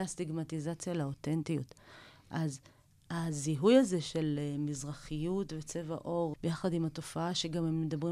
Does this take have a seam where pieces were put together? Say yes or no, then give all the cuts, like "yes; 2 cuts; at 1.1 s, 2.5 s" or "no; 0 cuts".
yes; 1 cut; at 6.3 s